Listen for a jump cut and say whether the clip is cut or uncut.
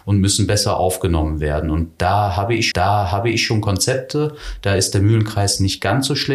cut